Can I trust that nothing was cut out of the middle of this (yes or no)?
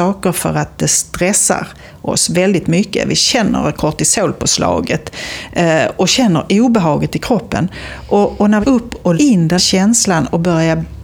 no